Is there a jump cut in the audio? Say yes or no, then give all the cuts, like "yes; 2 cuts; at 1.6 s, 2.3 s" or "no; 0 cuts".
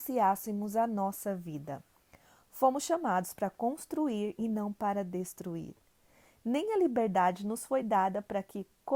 no; 0 cuts